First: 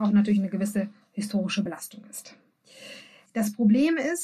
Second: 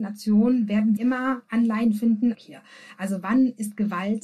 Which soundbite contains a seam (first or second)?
second